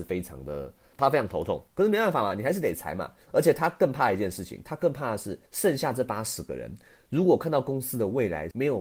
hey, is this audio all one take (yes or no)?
no